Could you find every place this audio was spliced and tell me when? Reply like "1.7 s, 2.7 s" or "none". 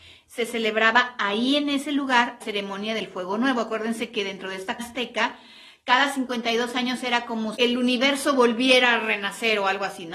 2.4 s, 4.8 s, 7.6 s